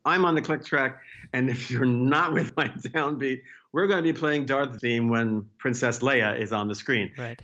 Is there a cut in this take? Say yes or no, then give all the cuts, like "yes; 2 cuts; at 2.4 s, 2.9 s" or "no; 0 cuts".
yes; 1 cut; at 4.8 s